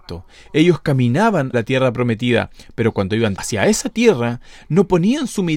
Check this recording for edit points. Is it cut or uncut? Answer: cut